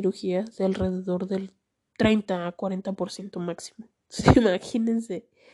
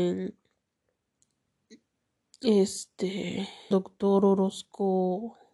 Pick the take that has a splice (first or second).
second